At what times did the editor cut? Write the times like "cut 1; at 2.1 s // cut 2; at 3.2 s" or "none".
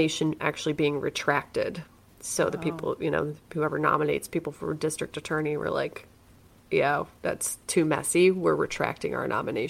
none